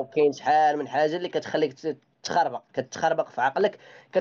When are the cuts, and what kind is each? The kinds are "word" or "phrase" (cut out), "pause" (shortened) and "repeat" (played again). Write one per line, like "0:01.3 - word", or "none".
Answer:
none

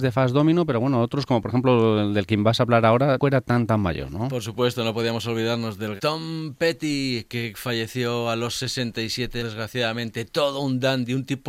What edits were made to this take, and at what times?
0:03.2 - word
0:06.0 - word
0:09.4 - word

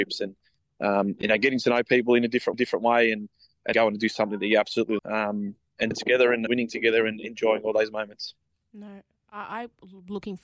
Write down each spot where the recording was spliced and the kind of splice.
0:02.5 - repeat
0:03.7 - word
0:05.0 - word
0:05.9 - word
0:06.5 - word

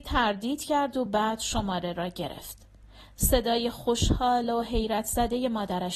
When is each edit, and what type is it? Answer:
none

